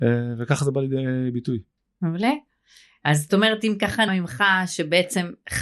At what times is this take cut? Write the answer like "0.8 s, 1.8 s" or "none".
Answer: 1.8 s, 4.1 s

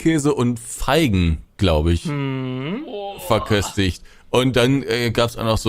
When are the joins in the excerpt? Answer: none

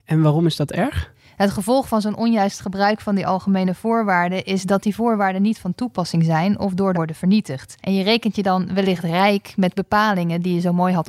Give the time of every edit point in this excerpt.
6.9 s, 7.8 s

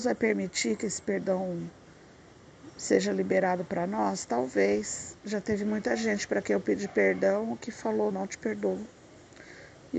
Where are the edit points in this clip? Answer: 5.2 s, 8.1 s

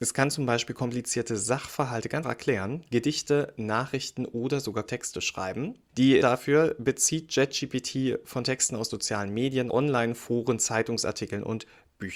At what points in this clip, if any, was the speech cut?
2.2 s, 4.9 s, 6.2 s, 8.9 s, 9.7 s

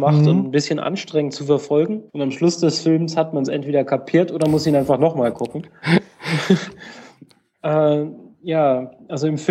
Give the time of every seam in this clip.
2.1 s

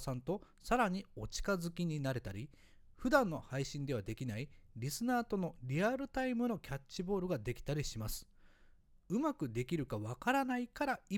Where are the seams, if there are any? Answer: none

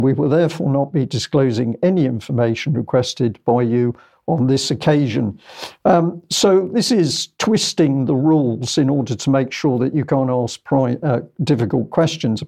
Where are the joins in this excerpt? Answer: none

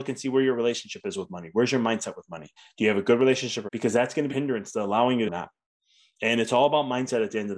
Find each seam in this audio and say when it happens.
2.6 s, 3.7 s, 4.3 s, 5.3 s

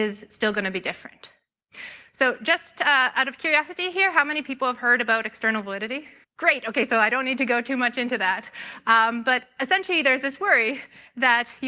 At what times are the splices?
6.2 s

